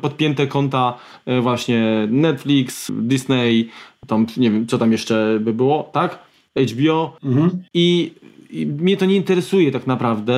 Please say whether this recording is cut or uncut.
uncut